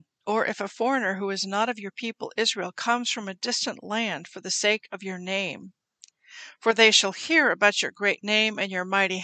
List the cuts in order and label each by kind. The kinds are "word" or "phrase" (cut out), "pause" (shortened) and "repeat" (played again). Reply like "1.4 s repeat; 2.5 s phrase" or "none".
none